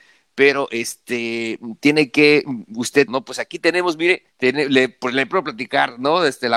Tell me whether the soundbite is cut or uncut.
cut